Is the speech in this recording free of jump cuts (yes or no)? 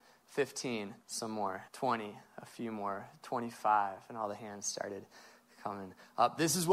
no